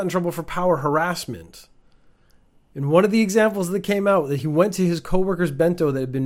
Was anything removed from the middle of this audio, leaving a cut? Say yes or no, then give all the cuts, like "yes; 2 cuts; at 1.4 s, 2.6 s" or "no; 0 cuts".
no; 0 cuts